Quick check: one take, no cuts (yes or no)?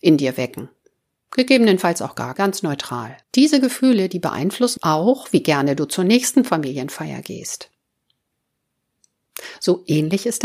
no